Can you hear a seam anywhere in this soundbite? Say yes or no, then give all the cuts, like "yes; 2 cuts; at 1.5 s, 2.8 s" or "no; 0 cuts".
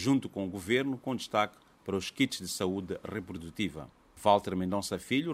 no; 0 cuts